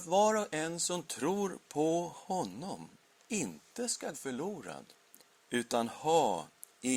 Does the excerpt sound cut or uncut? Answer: cut